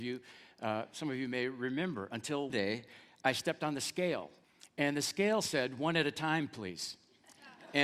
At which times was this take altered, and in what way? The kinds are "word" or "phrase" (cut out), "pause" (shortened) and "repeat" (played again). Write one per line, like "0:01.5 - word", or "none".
0:02.5 - word
0:04.4 - pause